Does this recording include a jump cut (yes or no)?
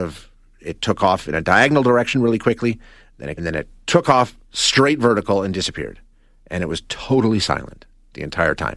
yes